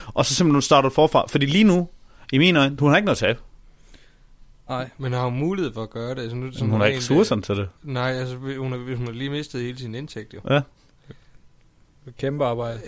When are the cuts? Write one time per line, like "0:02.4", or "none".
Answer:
0:07.8